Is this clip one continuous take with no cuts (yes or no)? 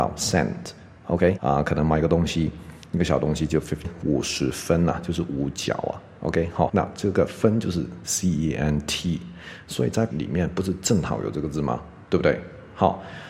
no